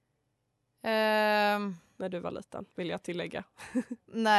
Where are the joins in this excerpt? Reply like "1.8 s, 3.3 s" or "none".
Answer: 2.7 s